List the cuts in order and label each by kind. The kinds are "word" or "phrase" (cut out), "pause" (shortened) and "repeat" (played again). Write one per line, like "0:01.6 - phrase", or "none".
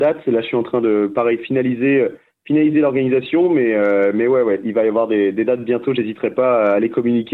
none